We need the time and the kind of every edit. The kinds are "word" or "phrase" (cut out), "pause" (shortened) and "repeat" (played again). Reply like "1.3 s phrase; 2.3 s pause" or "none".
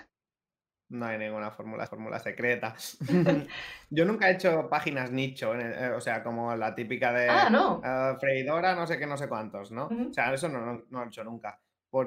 1.9 s repeat